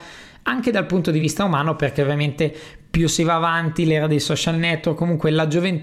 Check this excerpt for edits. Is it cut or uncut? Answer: uncut